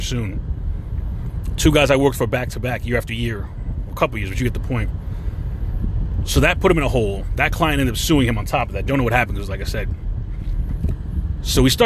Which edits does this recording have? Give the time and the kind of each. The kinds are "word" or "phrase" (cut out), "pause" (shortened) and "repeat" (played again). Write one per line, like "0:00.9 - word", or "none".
none

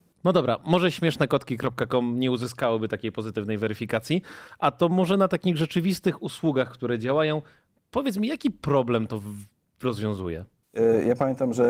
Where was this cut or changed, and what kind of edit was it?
none

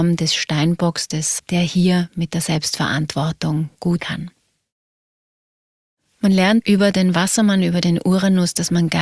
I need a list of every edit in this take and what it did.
0:01.4 - word
0:04.0 - word
0:06.6 - word

